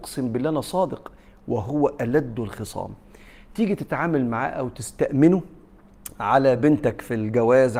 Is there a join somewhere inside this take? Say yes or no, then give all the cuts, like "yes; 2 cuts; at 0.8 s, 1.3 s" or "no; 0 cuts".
no; 0 cuts